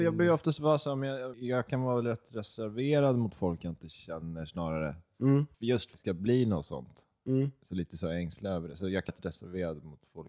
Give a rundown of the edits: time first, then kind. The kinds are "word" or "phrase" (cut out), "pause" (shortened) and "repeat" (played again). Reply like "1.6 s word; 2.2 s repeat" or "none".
1.3 s word; 5.5 s pause; 5.9 s phrase; 9.1 s word